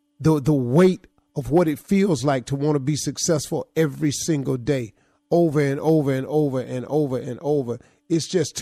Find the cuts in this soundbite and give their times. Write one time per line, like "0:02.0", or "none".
none